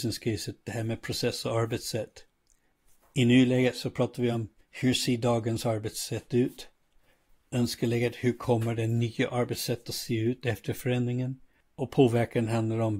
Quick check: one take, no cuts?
yes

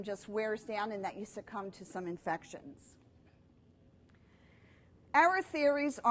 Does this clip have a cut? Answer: no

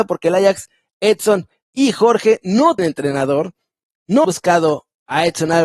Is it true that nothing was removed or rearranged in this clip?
no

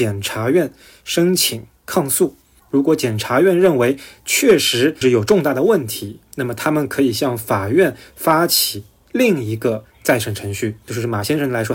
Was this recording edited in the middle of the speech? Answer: no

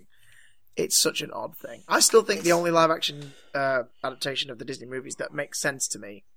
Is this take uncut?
yes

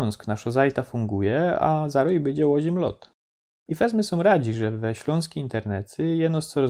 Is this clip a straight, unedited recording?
yes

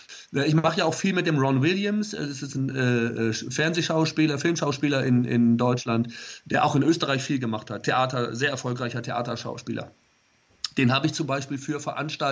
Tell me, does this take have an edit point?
no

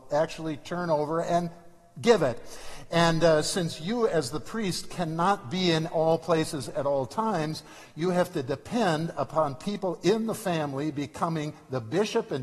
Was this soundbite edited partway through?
no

